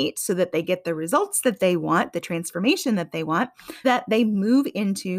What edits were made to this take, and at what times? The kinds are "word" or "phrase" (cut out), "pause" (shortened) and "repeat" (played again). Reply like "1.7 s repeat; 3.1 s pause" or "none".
3.8 s word